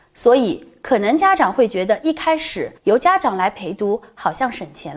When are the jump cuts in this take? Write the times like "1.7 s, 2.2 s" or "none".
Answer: 2.8 s